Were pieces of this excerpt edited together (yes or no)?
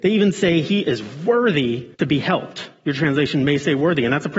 yes